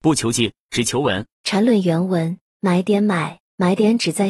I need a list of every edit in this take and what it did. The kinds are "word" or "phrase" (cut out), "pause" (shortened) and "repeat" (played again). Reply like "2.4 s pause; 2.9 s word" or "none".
1.3 s pause; 2.5 s pause